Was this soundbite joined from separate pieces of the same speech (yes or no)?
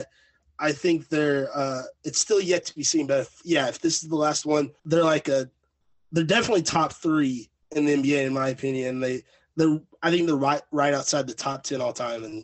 yes